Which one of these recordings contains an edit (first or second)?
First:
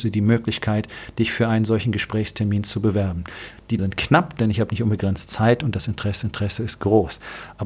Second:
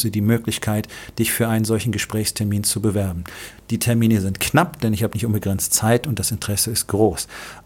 first